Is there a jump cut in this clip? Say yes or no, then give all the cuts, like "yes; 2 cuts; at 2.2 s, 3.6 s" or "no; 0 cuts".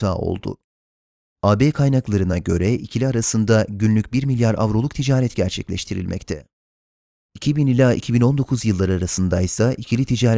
no; 0 cuts